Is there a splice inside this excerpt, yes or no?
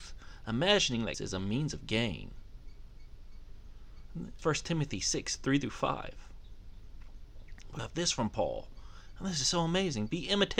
yes